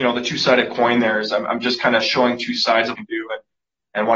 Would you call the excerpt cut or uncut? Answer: cut